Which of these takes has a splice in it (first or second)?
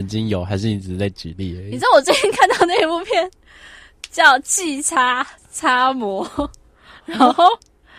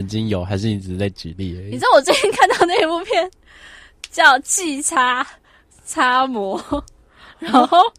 first